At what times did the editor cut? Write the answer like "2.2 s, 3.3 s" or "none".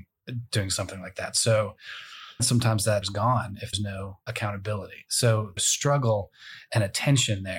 2.4 s, 3.0 s, 3.7 s, 4.3 s, 5.6 s

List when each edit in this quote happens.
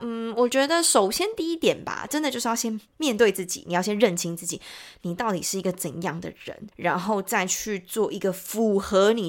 6.7 s

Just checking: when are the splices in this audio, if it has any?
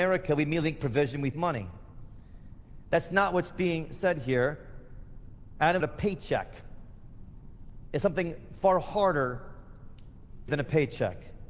1.3 s, 5.8 s, 10.5 s

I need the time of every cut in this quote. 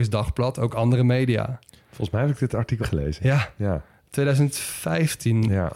2.8 s

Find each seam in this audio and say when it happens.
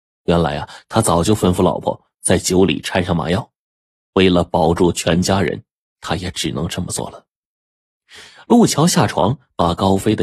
none

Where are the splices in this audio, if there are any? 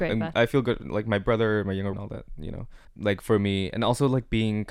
1.9 s

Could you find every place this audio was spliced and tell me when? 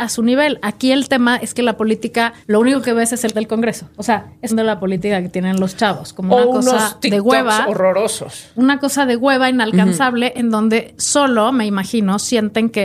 2.4 s, 3.3 s, 4.5 s

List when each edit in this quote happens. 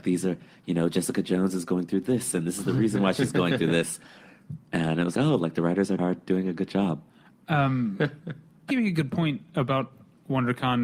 5.1 s, 6.0 s, 8.7 s

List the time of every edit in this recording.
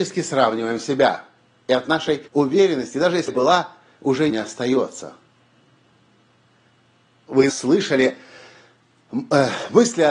1.4 s, 2.3 s, 3.3 s, 4.3 s, 7.5 s

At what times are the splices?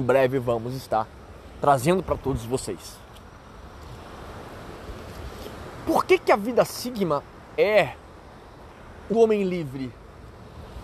7.6 s, 9.1 s

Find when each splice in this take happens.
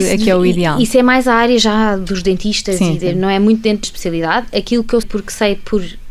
3.8 s, 5.0 s

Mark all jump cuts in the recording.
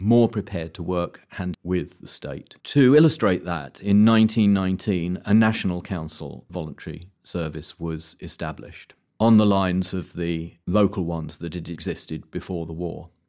1.5 s, 2.6 s, 6.5 s

